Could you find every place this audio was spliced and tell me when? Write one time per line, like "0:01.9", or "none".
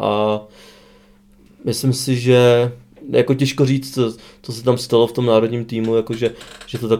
none